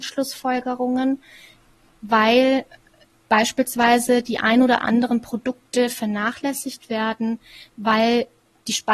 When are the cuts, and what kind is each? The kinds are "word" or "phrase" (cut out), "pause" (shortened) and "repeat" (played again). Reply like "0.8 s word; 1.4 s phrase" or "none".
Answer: none